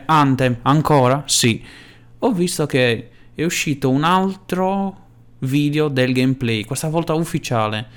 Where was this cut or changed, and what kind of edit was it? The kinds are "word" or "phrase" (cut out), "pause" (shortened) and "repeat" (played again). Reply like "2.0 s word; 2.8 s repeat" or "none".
5.2 s pause

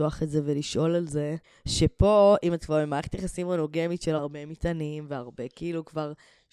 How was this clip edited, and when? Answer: 1.4 s pause; 4.2 s phrase

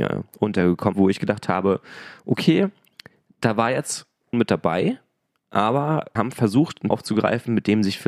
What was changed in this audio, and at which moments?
0.9 s word; 4.3 s word; 6.2 s word; 6.9 s word

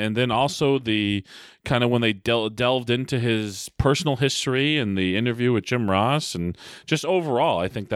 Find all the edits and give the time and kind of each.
none

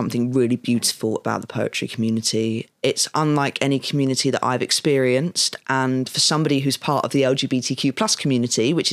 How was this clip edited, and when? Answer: none

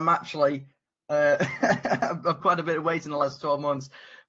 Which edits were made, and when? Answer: 2.4 s phrase

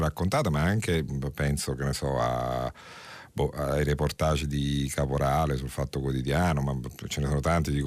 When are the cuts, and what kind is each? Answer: none

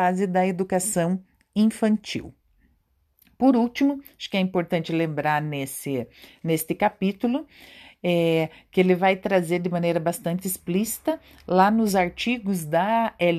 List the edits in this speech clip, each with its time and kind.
none

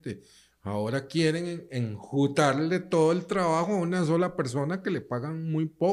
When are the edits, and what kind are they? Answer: none

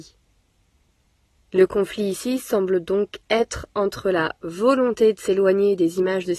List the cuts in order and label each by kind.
none

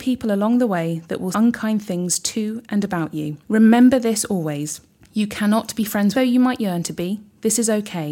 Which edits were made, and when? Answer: 1.3 s word; 3.4 s pause; 5.0 s pause; 6.1 s phrase

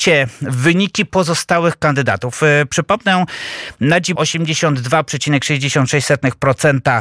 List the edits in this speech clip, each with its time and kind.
4.2 s phrase

